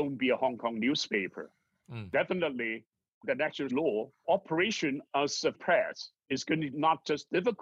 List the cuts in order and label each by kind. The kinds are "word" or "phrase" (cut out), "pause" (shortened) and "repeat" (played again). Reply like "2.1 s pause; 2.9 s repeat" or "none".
3.2 s word; 3.7 s word; 4.2 s word; 5.5 s word; 6.7 s word